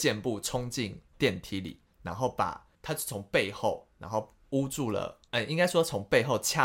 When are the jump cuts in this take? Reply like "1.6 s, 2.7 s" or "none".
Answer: 1.1 s, 2.7 s, 5.3 s

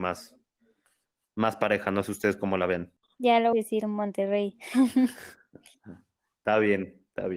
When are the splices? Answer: 3.5 s

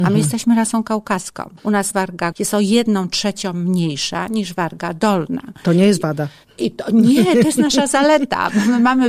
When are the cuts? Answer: 1.6 s, 1.9 s, 2.3 s

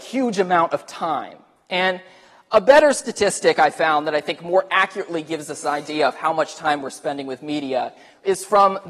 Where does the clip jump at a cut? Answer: none

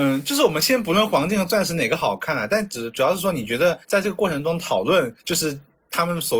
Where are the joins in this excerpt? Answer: 3.8 s, 5.2 s

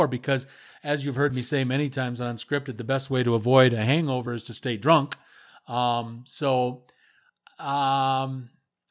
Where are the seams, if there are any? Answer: none

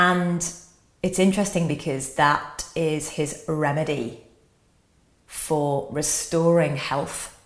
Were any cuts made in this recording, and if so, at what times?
none

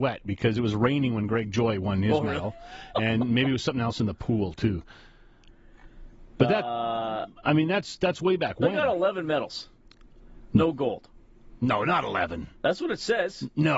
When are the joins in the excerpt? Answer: none

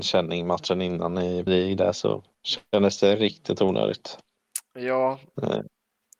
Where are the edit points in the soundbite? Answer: 1.5 s

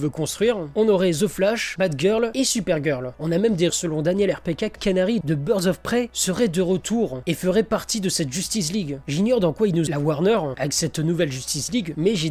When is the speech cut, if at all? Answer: 1.8 s, 3.7 s, 4.7 s, 9.9 s

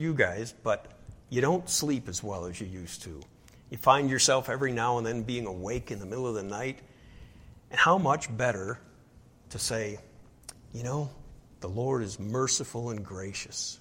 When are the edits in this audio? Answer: 11.5 s

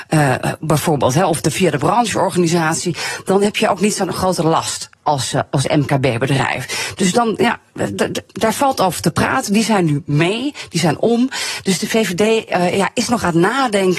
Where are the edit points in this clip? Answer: none

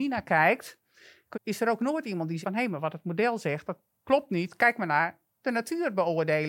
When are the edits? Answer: 1.3 s, 2.4 s

